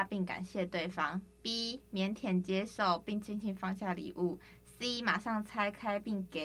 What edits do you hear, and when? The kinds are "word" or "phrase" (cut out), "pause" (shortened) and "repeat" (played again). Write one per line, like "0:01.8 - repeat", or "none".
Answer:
none